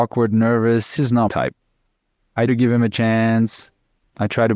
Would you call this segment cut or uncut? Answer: cut